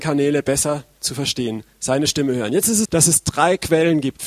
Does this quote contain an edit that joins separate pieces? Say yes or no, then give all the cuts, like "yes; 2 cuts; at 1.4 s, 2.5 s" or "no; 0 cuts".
yes; 1 cut; at 2.8 s